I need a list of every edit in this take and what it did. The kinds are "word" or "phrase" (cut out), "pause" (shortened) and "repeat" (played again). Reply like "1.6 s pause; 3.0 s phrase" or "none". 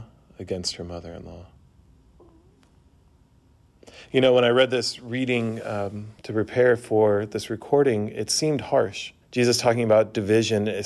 6.2 s pause; 9.2 s pause

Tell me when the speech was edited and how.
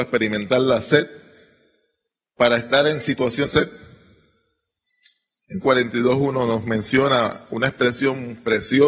3.5 s phrase; 5.6 s word

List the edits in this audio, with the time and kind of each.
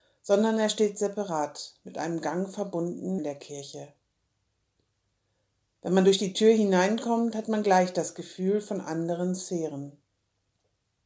3.2 s word

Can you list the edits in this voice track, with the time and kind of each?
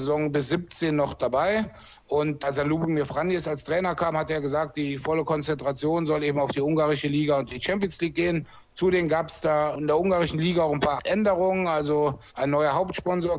12.3 s pause

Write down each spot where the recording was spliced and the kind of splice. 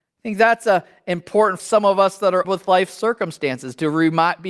1.6 s word; 2.4 s word

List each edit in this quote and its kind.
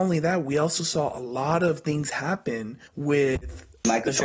2.9 s pause

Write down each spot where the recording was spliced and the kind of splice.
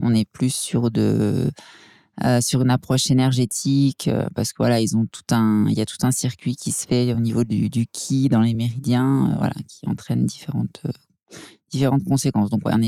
none

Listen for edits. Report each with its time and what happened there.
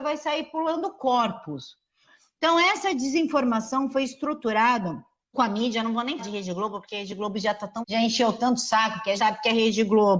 5.3 s word; 6.2 s word; 6.9 s word; 7.8 s word; 9.2 s word

